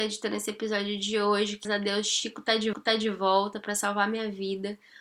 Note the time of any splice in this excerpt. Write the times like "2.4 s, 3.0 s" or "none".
1.6 s, 2.7 s